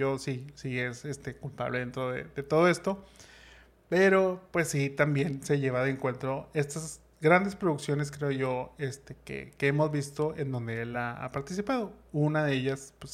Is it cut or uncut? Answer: uncut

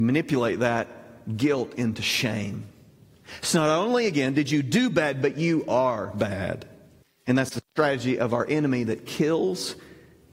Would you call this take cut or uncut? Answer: cut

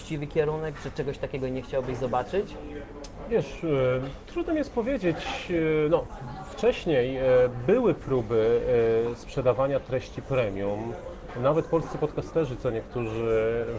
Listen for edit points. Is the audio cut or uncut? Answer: uncut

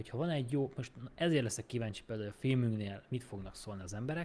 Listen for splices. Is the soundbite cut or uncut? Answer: uncut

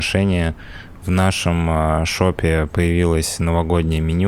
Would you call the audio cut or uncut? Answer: uncut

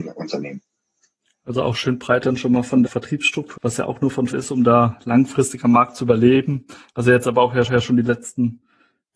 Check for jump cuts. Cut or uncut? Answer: cut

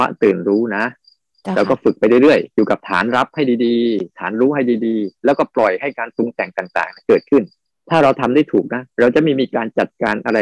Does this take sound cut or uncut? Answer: cut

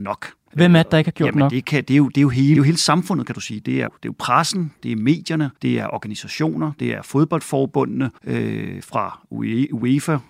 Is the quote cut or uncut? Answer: cut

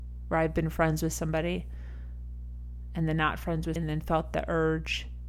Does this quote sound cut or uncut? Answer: cut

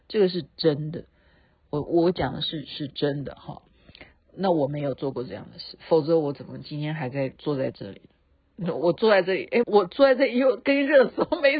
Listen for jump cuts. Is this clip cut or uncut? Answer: cut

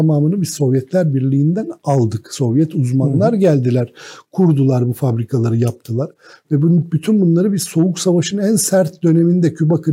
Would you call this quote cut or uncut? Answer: uncut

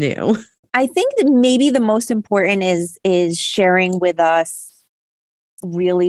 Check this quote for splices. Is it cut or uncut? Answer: uncut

